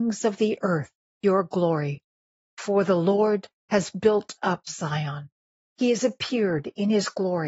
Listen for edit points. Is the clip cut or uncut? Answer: uncut